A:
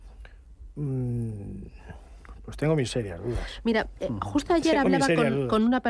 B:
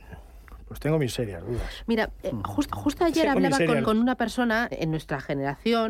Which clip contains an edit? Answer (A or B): B